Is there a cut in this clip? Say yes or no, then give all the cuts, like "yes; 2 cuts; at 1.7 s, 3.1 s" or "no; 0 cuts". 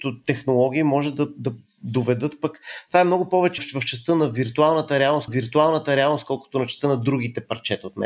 yes; 2 cuts; at 3.6 s, 5.3 s